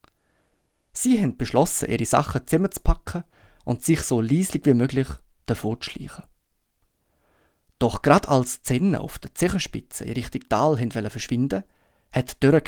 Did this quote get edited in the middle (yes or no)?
no